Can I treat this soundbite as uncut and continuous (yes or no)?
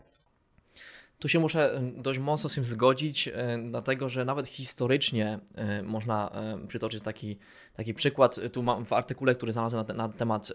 yes